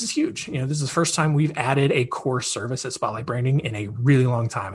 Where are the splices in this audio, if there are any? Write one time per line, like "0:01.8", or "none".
none